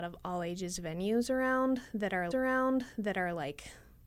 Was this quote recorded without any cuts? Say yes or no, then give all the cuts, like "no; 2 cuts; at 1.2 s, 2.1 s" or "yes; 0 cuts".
no; 1 cut; at 2.3 s